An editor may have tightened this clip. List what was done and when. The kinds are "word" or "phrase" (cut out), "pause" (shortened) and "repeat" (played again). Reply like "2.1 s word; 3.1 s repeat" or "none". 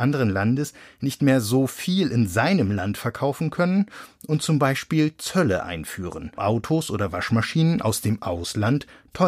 6.4 s word